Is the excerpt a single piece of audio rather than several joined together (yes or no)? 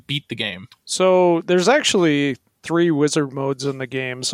yes